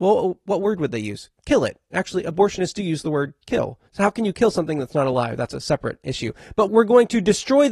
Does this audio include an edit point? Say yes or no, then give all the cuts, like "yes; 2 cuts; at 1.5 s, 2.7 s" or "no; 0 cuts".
yes; 2 cuts; at 3.9 s, 6.7 s